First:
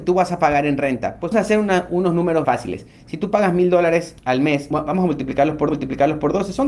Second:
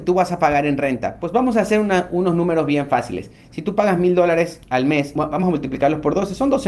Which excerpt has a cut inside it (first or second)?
first